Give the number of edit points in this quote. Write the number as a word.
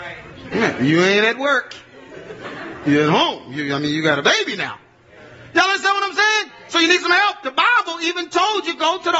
zero